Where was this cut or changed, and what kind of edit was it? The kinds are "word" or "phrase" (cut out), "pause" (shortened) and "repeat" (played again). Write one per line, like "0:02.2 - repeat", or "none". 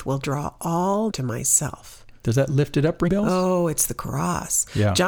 0:01.1 - word
0:03.1 - word